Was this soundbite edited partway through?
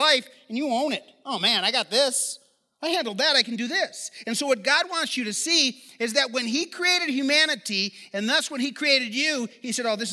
no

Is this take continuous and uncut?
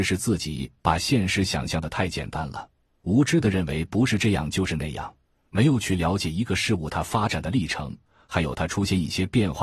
yes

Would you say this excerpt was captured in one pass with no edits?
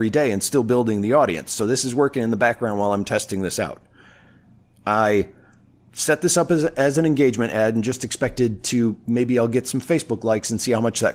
yes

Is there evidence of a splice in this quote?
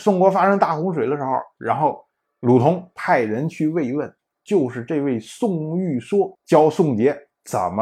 yes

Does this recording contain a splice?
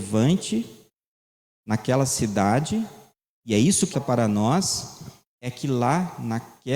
yes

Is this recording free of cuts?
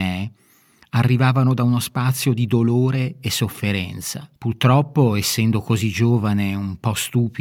no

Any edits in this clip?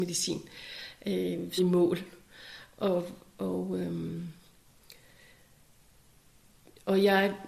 yes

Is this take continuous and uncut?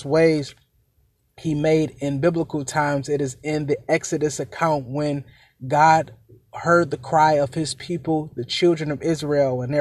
yes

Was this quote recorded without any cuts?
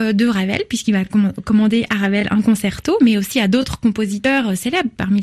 yes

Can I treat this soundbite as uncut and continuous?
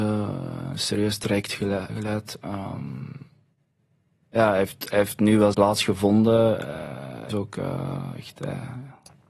no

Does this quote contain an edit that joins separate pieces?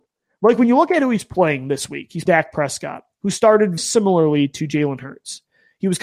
yes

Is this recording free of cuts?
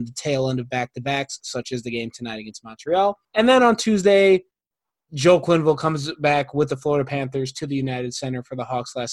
no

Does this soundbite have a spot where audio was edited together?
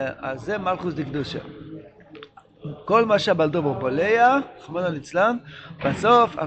no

